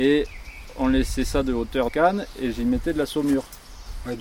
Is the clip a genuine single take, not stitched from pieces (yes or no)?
no